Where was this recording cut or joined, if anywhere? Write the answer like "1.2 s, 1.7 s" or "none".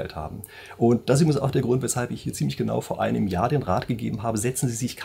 none